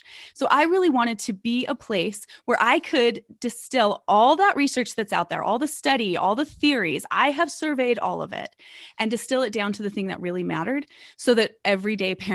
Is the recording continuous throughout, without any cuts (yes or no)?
yes